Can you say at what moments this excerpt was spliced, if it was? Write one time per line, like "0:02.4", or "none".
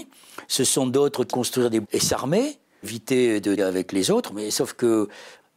0:01.3
0:01.8
0:02.8
0:03.6